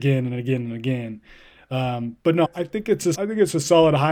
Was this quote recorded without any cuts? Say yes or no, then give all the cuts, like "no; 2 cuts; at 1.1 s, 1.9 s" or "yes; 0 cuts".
no; 2 cuts; at 2.4 s, 3.1 s